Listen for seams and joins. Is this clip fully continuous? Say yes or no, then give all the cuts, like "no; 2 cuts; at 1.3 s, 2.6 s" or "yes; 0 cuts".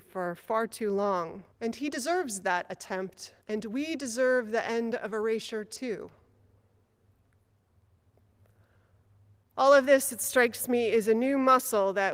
no; 2 cuts; at 1.5 s, 3.4 s